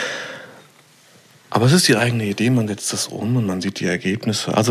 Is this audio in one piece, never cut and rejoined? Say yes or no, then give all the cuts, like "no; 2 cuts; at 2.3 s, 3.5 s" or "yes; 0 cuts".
yes; 0 cuts